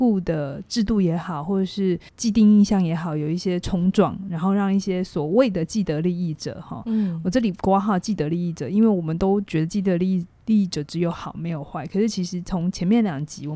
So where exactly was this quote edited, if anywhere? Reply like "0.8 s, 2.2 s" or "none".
2.1 s